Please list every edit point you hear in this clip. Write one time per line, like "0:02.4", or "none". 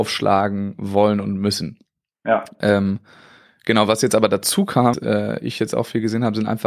0:04.9